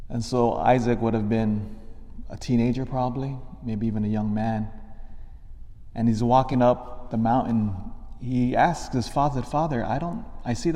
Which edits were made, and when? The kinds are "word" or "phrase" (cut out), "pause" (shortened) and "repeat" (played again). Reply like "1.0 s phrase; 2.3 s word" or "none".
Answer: none

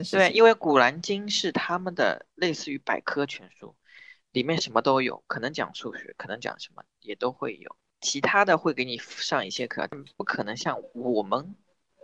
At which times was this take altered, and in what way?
7.9 s pause

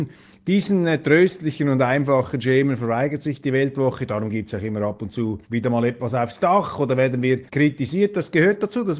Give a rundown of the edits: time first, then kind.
5.4 s pause; 7.5 s pause

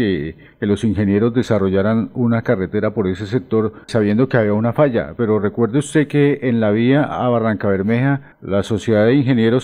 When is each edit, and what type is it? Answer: 3.9 s word

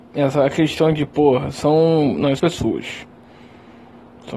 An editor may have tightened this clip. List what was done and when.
2.4 s phrase

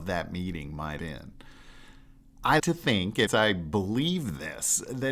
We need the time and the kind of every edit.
1.0 s word; 2.6 s word; 3.3 s phrase

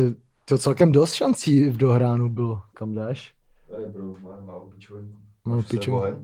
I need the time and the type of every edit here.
none

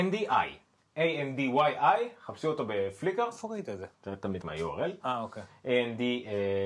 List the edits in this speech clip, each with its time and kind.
3.9 s pause; 4.4 s word

